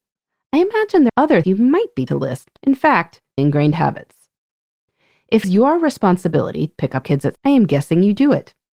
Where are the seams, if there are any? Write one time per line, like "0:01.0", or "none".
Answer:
0:01.1
0:01.4
0:02.1
0:02.6
0:03.4
0:05.4
0:06.7
0:07.0
0:07.4